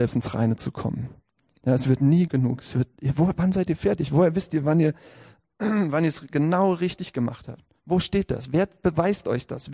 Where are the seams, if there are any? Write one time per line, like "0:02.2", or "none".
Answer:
0:02.3

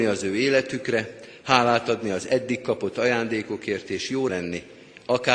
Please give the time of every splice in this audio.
0:04.3

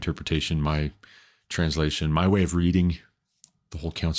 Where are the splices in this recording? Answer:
none

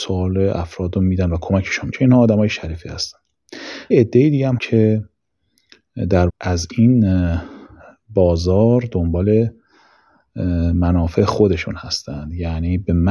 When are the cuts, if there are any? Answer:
0:01.9
0:03.9
0:04.6
0:06.3

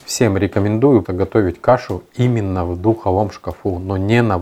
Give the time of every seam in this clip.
0:01.0

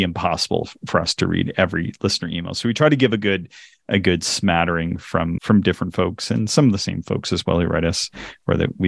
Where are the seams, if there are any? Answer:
0:05.4

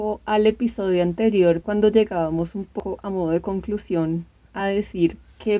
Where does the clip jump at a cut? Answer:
none

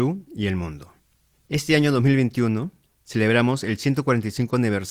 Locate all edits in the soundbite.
none

